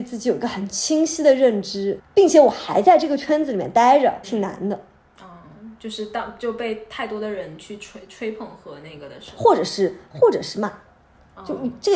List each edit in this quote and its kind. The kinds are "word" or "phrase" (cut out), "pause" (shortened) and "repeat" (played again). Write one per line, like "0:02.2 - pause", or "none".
0:02.0 - word
0:04.2 - word

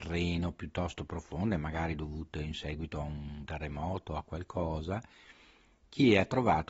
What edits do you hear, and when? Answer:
0:03.5 - word

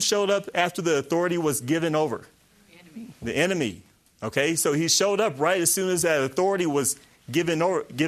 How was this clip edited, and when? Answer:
0:02.4 - pause

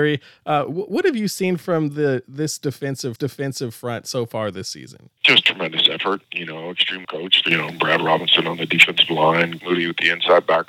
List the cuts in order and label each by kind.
0:03.2 - repeat
0:05.2 - pause
0:06.2 - pause
0:07.0 - word
0:09.6 - word

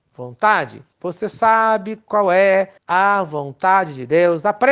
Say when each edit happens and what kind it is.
0:00.9 - pause
0:02.8 - pause

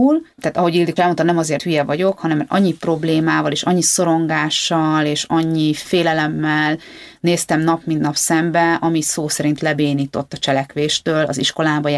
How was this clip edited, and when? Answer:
0:01.0 - word
0:01.6 - word

